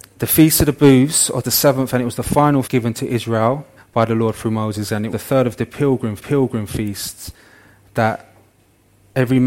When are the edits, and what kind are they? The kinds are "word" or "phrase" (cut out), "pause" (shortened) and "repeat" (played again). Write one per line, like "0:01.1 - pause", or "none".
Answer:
0:01.4 - phrase
0:02.6 - word
0:03.8 - pause
0:05.1 - word
0:06.2 - repeat